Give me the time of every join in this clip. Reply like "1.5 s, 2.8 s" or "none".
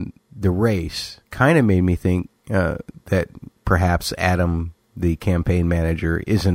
1.3 s, 3.6 s

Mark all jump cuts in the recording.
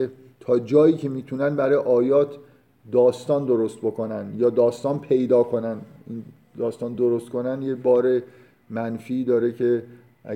none

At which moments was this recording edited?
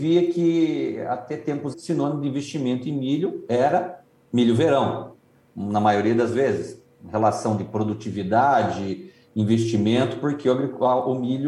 1.7 s

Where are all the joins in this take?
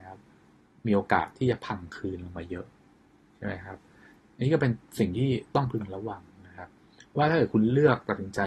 none

